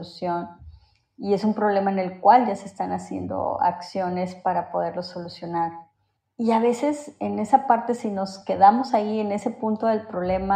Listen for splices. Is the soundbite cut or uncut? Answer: uncut